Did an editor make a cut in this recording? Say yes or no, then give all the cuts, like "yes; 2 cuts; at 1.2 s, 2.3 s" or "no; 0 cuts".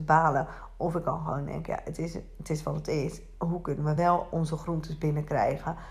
no; 0 cuts